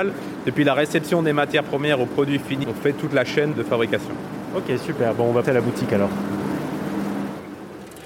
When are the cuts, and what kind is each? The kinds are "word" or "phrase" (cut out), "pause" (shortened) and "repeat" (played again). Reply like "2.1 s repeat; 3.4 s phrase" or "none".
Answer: 2.6 s word; 3.5 s word; 5.4 s word